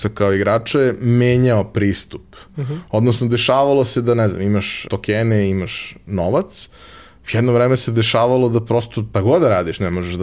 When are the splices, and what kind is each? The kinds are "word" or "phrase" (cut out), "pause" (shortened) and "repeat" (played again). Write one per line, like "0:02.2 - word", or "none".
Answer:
0:04.9 - word
0:09.1 - word